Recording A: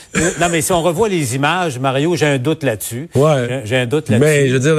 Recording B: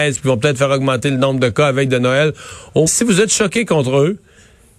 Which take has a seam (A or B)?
B